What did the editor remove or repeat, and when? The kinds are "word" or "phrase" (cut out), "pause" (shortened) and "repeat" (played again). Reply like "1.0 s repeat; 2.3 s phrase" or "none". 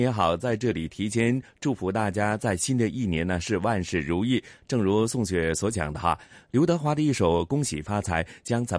6.5 s word